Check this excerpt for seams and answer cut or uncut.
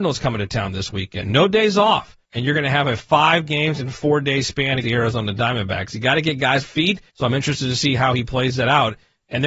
cut